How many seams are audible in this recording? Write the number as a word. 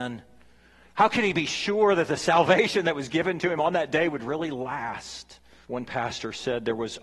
one